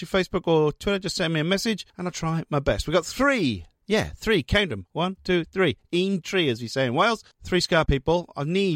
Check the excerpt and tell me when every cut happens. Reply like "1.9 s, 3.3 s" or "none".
6.2 s, 7.9 s